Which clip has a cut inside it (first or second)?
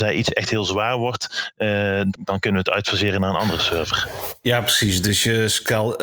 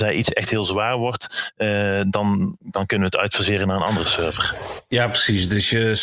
first